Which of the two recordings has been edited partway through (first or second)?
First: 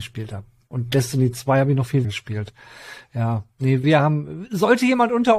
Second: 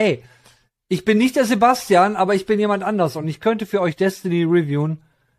first